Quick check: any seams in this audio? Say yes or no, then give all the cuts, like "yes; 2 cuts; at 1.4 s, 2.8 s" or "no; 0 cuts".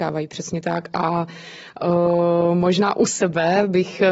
no; 0 cuts